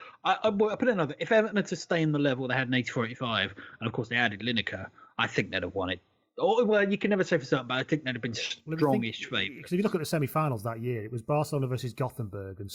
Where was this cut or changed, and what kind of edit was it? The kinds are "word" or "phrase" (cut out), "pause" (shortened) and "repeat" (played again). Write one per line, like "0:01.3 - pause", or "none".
none